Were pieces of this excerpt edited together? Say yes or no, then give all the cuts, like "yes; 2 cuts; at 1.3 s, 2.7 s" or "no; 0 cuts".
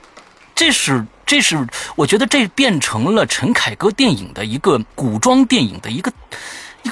yes; 1 cut; at 4.9 s